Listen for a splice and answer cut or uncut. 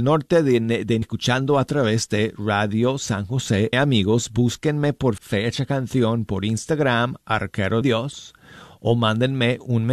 cut